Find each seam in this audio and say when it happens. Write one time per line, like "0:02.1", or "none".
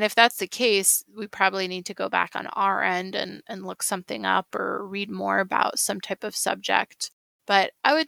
none